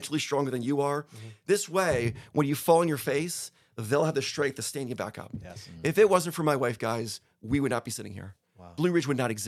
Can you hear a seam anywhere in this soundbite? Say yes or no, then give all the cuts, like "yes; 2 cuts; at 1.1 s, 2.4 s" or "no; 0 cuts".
no; 0 cuts